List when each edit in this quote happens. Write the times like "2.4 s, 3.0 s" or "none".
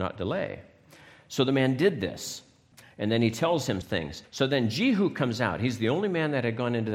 2.7 s, 3.8 s, 4.3 s